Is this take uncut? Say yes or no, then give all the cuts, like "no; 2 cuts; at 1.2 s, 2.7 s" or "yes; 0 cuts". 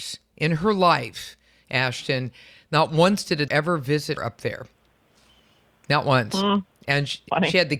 no; 2 cuts; at 3.5 s, 4.2 s